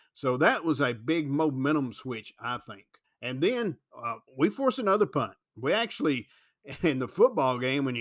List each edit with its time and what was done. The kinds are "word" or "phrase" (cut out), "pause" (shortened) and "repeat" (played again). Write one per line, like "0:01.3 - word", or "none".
0:03.0 - pause
0:04.3 - pause
0:05.4 - pause